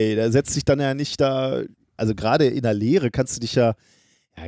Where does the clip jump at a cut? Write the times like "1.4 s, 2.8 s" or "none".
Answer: none